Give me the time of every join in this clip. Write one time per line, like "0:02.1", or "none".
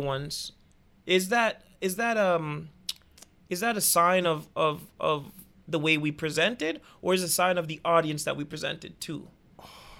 none